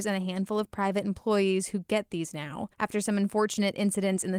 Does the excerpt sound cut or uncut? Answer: cut